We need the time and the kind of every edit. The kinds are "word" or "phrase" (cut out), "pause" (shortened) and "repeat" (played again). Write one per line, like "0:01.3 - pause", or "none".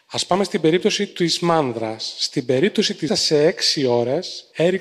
0:03.1 - phrase